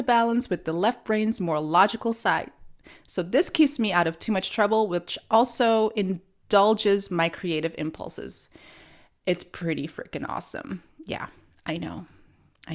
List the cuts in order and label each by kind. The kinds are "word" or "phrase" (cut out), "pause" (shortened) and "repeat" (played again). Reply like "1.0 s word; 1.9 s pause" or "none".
none